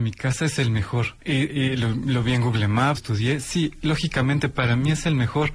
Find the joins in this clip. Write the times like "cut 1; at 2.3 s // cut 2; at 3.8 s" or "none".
cut 1; at 1.2 s // cut 2; at 3.0 s